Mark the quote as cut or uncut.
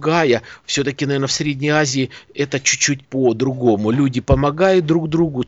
cut